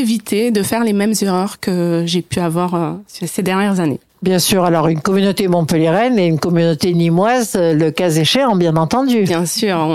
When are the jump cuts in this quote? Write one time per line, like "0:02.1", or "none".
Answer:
0:04.1